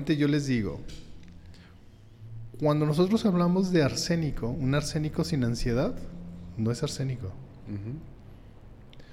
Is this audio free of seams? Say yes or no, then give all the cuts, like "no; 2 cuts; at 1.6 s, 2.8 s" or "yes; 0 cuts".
yes; 0 cuts